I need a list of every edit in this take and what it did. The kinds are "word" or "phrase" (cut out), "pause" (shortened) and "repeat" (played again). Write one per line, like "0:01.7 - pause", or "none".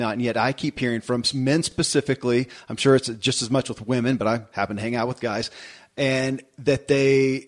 none